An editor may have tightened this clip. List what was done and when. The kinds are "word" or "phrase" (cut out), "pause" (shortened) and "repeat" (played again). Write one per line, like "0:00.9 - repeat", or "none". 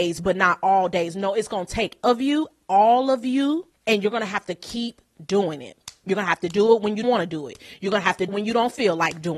0:02.0 - word
0:03.7 - pause
0:07.0 - word
0:08.3 - word